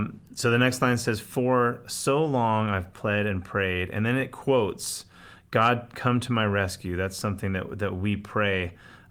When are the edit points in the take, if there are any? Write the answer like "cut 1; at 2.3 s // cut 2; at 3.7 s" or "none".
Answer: none